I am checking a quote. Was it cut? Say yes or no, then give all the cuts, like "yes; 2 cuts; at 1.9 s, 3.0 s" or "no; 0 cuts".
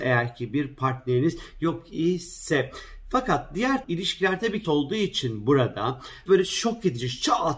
yes; 3 cuts; at 3.8 s, 4.6 s, 6.3 s